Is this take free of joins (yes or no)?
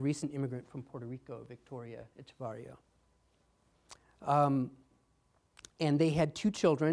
yes